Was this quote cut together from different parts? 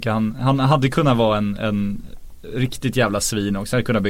no; 0 cuts

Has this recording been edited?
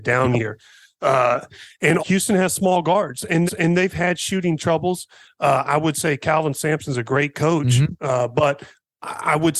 yes; 2 cuts; at 2.0 s, 3.5 s

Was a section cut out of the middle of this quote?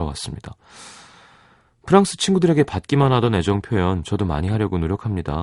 no; 0 cuts

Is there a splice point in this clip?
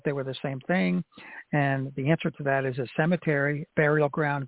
no; 0 cuts

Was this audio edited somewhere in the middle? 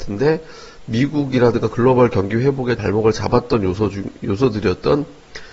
yes; 1 cut; at 2.8 s

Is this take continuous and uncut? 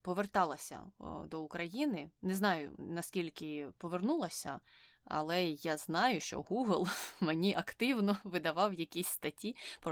yes; 0 cuts

